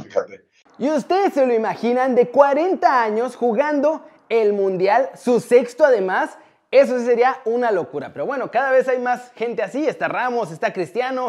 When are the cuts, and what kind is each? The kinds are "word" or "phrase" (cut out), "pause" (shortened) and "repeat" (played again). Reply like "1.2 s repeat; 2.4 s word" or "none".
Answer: none